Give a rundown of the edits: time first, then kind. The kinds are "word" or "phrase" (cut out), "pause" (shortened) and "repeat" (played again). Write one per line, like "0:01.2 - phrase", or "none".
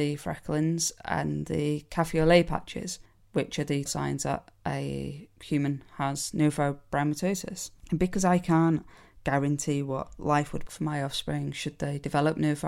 0:03.9 - word
0:07.8 - pause
0:10.7 - word